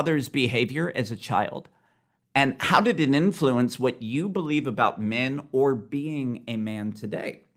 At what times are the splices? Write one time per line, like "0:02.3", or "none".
none